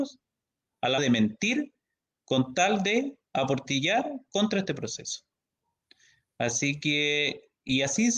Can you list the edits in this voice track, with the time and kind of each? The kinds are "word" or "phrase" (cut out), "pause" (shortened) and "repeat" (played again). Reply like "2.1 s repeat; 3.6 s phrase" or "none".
1.0 s word